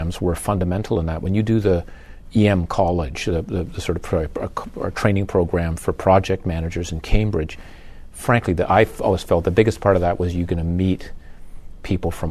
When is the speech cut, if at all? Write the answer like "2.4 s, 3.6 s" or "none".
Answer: none